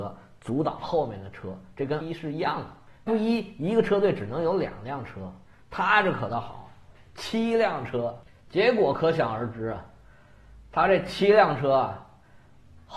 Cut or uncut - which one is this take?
cut